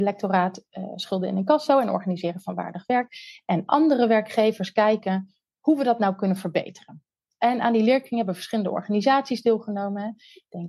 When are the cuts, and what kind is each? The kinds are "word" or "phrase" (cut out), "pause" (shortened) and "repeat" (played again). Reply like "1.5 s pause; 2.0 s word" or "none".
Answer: none